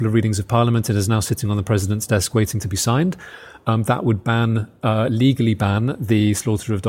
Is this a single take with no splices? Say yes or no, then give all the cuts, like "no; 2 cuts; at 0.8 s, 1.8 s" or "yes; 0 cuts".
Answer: yes; 0 cuts